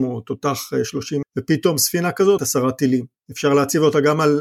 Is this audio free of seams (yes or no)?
no